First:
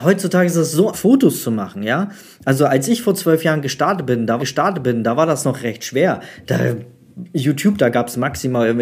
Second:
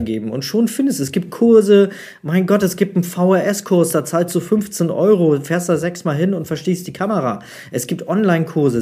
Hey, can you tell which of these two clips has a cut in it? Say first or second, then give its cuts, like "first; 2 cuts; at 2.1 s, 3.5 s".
first; 2 cuts; at 0.9 s, 4.4 s